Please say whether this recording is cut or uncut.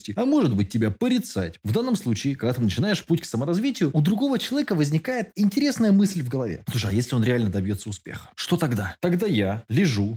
uncut